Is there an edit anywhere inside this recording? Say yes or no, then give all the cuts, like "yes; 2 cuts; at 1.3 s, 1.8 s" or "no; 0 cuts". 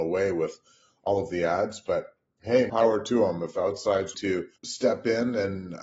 yes; 3 cuts; at 2.7 s, 4.1 s, 4.6 s